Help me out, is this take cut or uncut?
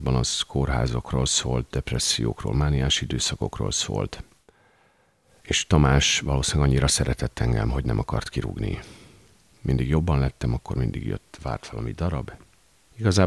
uncut